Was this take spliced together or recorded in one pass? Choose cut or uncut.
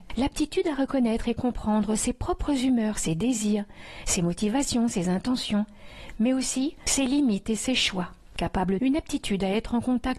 cut